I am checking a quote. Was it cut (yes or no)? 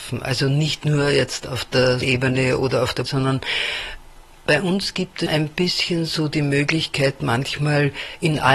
yes